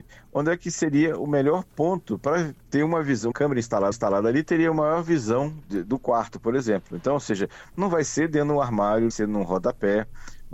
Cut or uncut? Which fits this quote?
cut